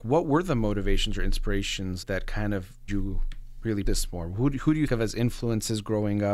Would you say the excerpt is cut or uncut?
cut